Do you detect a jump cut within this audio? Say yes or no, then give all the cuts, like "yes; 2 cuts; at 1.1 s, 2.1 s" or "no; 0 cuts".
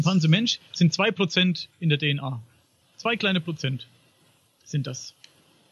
yes; 1 cut; at 2.8 s